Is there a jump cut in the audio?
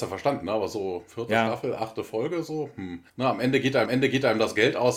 yes; 2 cuts; at 3.1 s, 3.9 s

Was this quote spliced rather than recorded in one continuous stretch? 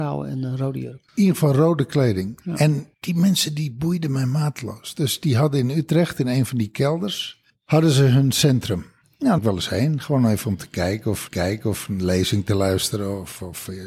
yes; 4 cuts; at 1.1 s, 2.9 s, 9.4 s, 11.3 s

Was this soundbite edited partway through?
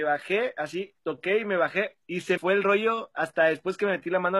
yes; 3 cuts; at 1.0 s, 2.0 s, 2.4 s

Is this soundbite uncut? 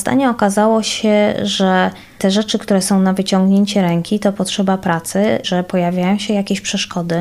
no; 1 cut; at 5.4 s

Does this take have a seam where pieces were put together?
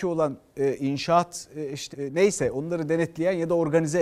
yes; 1 cut; at 1.9 s

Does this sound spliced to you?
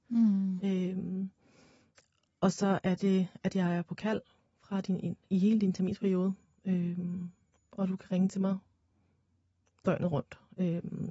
no; 0 cuts

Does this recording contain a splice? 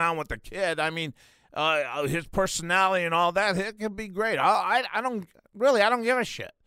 no; 0 cuts

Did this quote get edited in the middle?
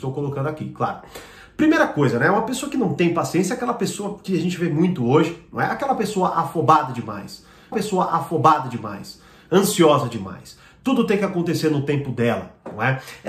yes; 1 cut; at 7.7 s

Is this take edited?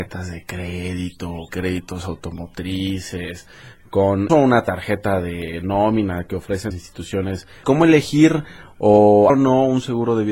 yes; 5 cuts; at 1.5 s, 4.3 s, 6.7 s, 7.6 s, 9.3 s

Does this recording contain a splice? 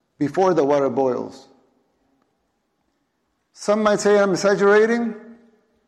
no; 0 cuts

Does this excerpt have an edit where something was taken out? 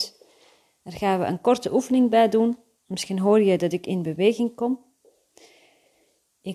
no; 0 cuts

